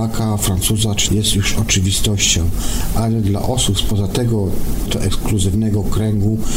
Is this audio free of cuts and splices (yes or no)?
no